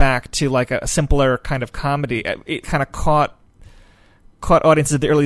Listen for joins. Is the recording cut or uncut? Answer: cut